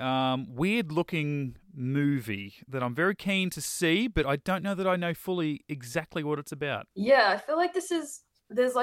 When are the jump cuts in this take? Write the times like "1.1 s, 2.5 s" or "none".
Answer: 6.9 s